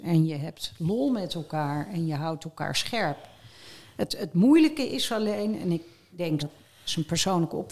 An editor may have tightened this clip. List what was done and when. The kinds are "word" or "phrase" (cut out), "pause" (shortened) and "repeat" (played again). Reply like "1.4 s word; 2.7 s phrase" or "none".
4.2 s word; 6.4 s phrase